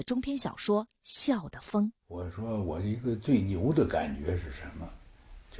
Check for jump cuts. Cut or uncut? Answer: cut